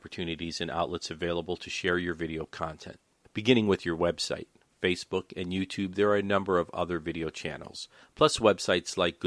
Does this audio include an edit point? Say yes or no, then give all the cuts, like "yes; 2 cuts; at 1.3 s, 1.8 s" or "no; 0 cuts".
no; 0 cuts